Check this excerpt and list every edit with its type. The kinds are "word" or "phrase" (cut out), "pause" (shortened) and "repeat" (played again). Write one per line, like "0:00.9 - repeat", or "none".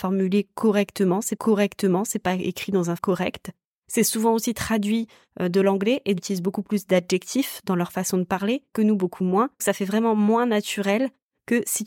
0:01.4 - repeat
0:03.0 - word
0:06.2 - phrase
0:08.7 - word
0:09.6 - word

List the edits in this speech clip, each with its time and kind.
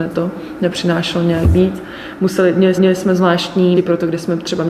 0:02.7 - repeat
0:03.7 - word

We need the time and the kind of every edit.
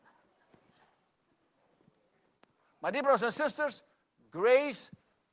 none

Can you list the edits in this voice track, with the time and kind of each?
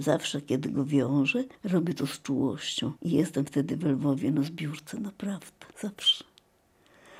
0:01.5 - pause
0:03.0 - pause
0:05.7 - pause

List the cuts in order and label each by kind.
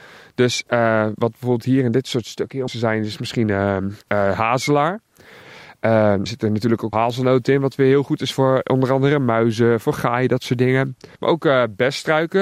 0:02.7 - word
0:04.0 - pause
0:06.3 - word
0:06.9 - word
0:11.2 - pause

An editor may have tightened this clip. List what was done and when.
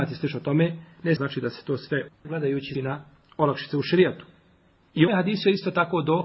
0:01.2 - word
0:02.1 - word
0:02.7 - word
0:05.1 - word

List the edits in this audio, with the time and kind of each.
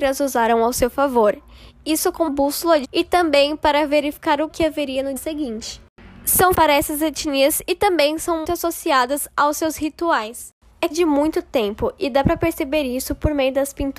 0:02.3 - word
0:02.8 - word
0:04.5 - word
0:05.2 - word
0:06.5 - word
0:08.4 - word
0:10.9 - word

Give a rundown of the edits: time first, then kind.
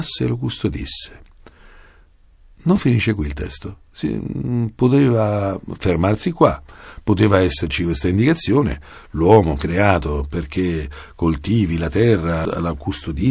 none

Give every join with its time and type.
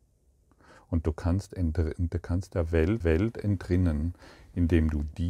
0:03.0 - repeat

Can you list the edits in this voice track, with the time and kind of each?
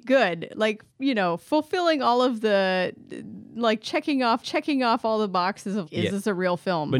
0:00.9 - pause
0:04.4 - repeat
0:05.9 - word

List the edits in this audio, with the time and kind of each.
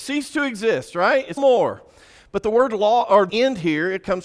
0:01.4 - word
0:03.3 - word

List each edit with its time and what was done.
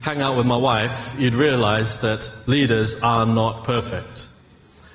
none

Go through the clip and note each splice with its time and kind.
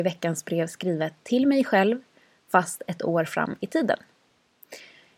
none

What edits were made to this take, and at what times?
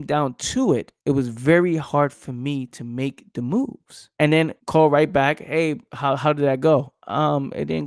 0:01.0 - pause
0:04.1 - pause
0:04.6 - pause

